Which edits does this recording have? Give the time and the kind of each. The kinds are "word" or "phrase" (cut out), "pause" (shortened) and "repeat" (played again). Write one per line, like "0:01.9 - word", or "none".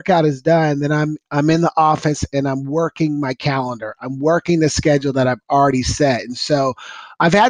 none